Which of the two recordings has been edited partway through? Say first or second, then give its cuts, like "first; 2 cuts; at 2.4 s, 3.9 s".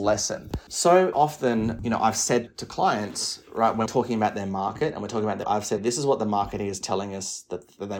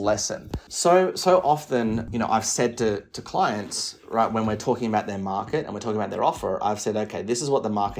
first; 5 cuts; at 1.1 s, 2.5 s, 3.9 s, 5.4 s, 5.8 s